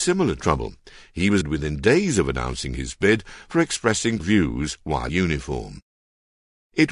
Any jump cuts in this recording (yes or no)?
yes